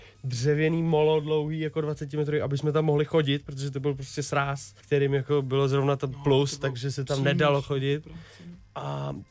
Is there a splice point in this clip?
yes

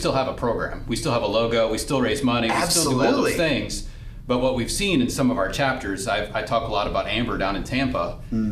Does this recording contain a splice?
no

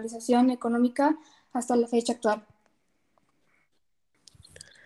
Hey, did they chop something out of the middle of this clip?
no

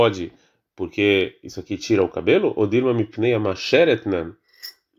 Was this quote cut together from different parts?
no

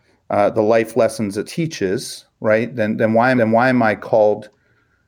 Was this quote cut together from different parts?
yes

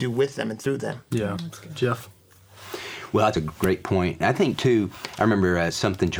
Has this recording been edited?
yes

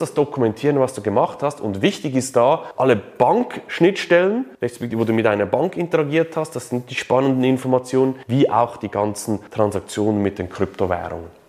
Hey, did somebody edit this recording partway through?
no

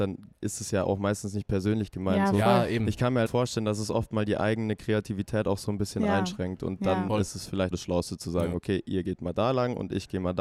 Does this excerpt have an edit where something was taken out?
yes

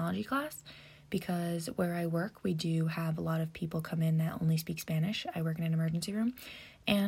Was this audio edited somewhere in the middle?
no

